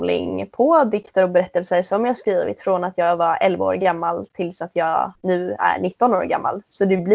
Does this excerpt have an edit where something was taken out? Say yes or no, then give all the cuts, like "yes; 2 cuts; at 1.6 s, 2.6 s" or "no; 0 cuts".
yes; 1 cut; at 5.1 s